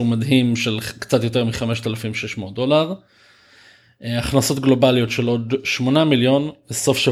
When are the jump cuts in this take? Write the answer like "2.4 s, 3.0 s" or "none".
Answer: none